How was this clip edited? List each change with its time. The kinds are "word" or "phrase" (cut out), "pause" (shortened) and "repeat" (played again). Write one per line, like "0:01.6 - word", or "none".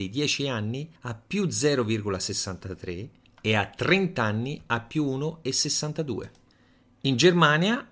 none